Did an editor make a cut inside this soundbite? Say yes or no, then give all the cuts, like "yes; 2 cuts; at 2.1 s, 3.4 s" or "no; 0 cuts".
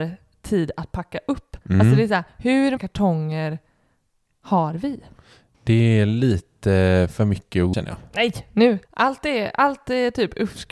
yes; 4 cuts; at 1.6 s, 2.8 s, 7.7 s, 8.8 s